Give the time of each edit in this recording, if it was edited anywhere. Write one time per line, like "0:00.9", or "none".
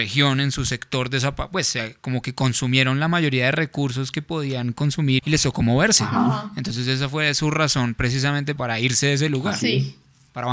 0:05.2
0:08.6